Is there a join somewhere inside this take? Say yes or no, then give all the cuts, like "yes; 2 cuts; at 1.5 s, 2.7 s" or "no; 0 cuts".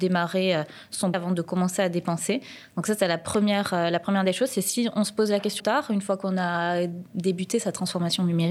yes; 2 cuts; at 1.1 s, 5.6 s